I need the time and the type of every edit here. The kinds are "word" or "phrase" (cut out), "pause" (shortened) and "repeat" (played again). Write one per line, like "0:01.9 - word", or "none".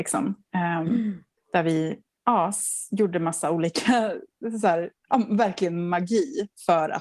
0:01.4 - pause
0:05.0 - pause